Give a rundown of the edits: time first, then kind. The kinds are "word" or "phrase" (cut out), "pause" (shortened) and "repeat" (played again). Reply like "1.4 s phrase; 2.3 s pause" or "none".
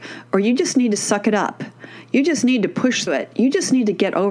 3.1 s word